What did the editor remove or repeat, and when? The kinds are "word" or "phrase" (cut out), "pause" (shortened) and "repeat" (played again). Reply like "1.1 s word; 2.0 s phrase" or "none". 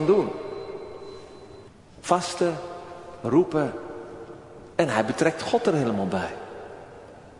1.7 s pause; 4.7 s pause